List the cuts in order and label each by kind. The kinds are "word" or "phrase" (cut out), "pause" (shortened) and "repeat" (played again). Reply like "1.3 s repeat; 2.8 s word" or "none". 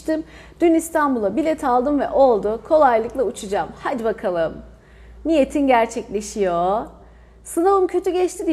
none